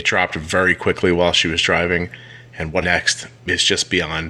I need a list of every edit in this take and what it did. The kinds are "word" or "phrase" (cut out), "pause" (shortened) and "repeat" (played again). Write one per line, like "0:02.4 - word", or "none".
0:02.8 - word
0:03.4 - pause